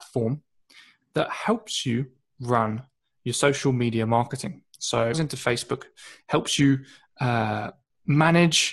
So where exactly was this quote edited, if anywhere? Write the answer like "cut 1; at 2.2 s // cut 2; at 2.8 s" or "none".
cut 1; at 5.1 s

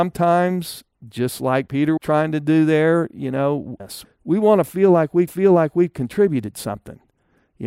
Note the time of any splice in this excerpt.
cut 1; at 2.0 s // cut 2; at 3.8 s // cut 3; at 5.3 s

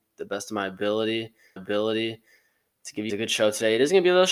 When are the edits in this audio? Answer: cut 1; at 1.6 s // cut 2; at 3.1 s

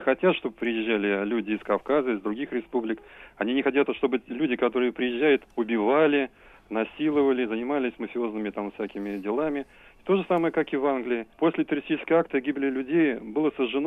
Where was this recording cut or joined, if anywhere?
cut 1; at 3.9 s // cut 2; at 5.5 s // cut 3; at 11.3 s

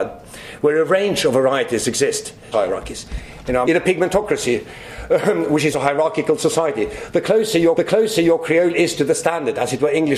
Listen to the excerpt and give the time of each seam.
cut 1; at 2.5 s // cut 2; at 3.6 s // cut 3; at 5.7 s // cut 4; at 7.8 s

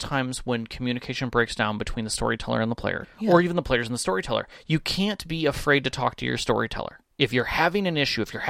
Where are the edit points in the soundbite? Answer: cut 1; at 3.0 s // cut 2; at 7.1 s

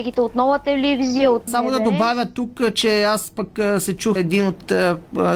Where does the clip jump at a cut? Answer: cut 1; at 1.5 s // cut 2; at 4.2 s

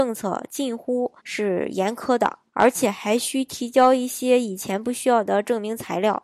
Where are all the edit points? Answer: cut 1; at 1.2 s // cut 2; at 2.5 s

